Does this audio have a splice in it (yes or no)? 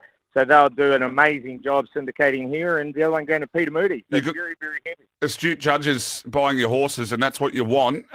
yes